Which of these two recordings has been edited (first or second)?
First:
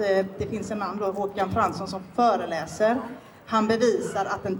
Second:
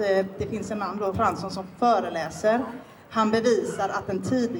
second